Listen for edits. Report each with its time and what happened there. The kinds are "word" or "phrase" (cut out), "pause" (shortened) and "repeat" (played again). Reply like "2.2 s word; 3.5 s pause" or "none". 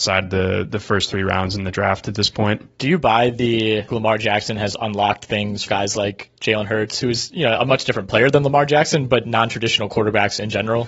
3.9 s word; 5.7 s word; 9.2 s word